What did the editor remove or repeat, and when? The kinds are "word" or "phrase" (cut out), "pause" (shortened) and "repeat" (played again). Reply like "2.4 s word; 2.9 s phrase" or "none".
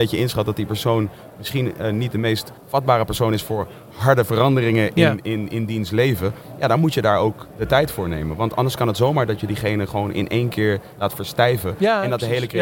2.6 s pause